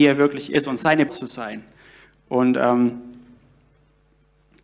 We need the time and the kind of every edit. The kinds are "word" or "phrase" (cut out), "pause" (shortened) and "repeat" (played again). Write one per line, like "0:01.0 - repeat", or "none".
0:01.1 - word